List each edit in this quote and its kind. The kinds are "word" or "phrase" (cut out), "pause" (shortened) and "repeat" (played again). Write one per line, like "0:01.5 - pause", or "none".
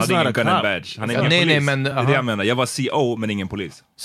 0:01.9 - word